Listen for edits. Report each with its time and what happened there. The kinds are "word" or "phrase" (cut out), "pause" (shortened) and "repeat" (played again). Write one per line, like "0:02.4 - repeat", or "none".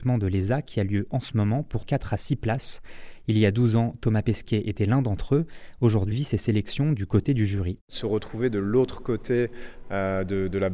0:01.8 - word
0:06.1 - word